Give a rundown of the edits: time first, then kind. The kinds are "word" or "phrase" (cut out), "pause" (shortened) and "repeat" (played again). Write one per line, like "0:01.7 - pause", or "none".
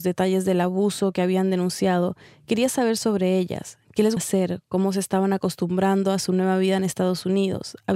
0:04.2 - word

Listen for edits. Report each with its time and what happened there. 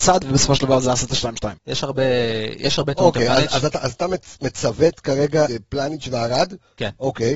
0:01.6 - pause
0:05.5 - word

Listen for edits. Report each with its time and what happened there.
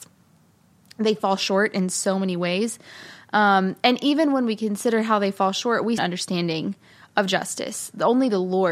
0:06.0 - phrase

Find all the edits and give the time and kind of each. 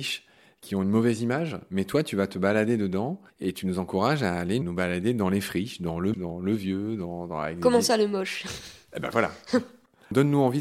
0:03.3 - pause
0:04.6 - word
0:06.1 - word

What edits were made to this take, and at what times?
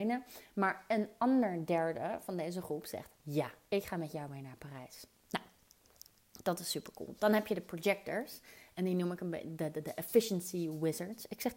none

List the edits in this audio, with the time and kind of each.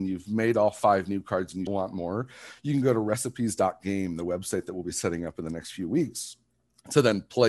0:01.7 - word

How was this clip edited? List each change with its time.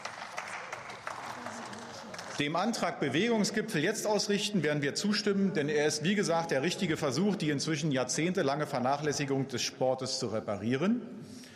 none

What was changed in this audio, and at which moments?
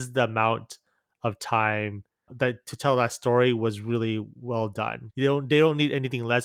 0:02.3 - word
0:05.1 - word

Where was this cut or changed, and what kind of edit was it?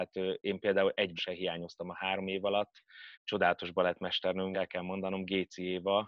0:01.2 - word
0:03.1 - pause
0:04.5 - phrase

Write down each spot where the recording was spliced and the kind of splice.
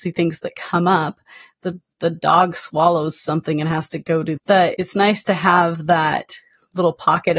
0:04.4 - phrase
0:04.7 - word

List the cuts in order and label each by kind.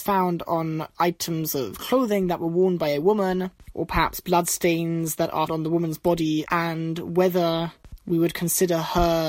0:05.5 - word
0:06.5 - word

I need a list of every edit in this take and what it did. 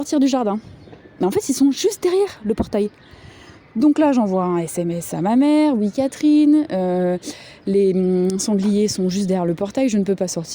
none

